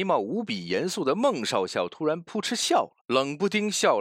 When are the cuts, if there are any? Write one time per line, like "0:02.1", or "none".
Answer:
0:03.0